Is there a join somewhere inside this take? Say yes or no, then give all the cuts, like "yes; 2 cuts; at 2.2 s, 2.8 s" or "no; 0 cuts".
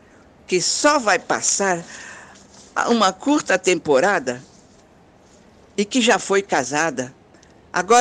no; 0 cuts